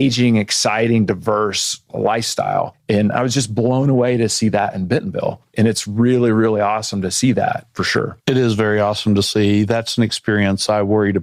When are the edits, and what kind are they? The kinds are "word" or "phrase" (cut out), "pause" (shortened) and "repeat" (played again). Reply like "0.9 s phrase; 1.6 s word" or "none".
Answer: 8.2 s pause